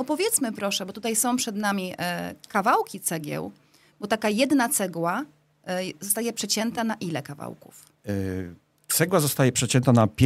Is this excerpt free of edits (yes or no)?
yes